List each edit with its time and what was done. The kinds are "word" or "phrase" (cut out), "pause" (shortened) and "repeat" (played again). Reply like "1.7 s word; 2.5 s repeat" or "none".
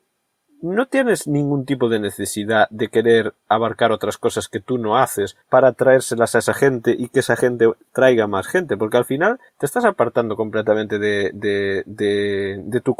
5.4 s pause; 9.5 s pause